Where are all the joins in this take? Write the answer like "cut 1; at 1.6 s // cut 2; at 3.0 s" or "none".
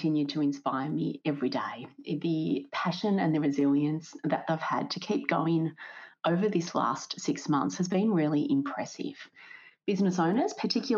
none